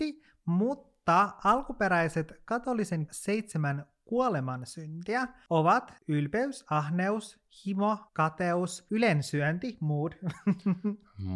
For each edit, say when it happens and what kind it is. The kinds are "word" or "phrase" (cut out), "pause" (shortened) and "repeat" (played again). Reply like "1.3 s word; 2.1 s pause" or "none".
3.1 s word; 6.0 s pause; 8.1 s pause